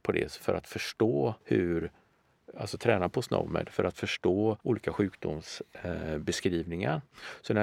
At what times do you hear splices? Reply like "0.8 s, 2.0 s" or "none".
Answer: 1.4 s, 4.6 s